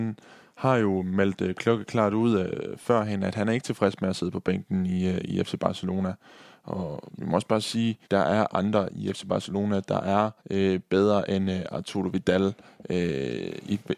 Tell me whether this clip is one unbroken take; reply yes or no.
no